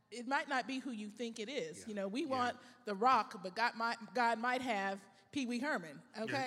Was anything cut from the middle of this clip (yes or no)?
no